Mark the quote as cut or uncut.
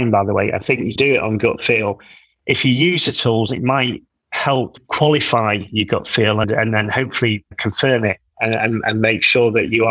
cut